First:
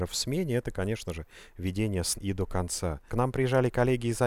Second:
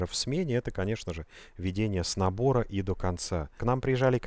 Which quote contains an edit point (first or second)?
first